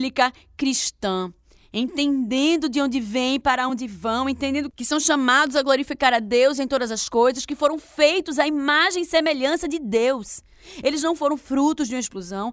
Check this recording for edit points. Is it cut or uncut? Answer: uncut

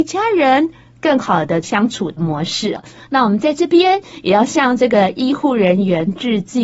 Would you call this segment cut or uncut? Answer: uncut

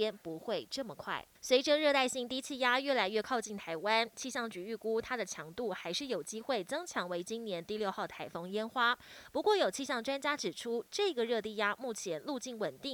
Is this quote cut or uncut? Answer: cut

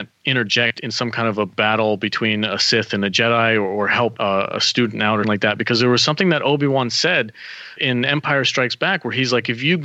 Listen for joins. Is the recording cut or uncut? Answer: cut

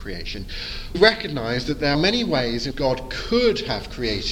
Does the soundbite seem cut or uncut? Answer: cut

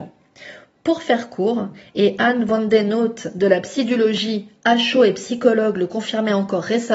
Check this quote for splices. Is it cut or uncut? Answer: uncut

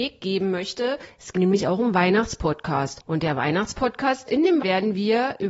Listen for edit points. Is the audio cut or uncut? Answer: cut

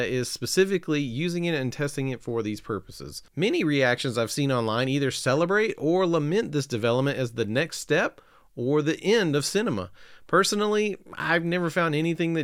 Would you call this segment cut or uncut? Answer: uncut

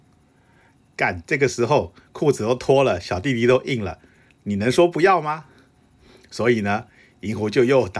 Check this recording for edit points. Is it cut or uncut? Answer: uncut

